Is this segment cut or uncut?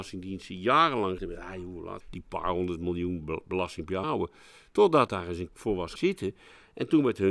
cut